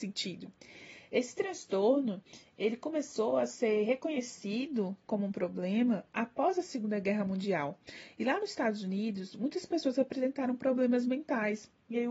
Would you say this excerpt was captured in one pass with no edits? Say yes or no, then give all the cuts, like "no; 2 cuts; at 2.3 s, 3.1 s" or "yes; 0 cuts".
yes; 0 cuts